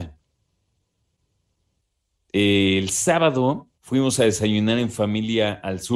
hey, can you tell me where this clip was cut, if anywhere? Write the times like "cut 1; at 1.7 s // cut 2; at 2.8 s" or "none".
cut 1; at 3.7 s